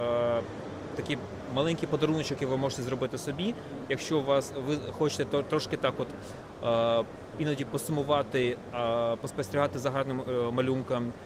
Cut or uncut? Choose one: uncut